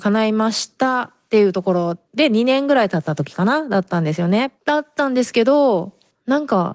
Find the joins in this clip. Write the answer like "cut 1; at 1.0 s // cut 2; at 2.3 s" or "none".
cut 1; at 2.0 s // cut 2; at 4.6 s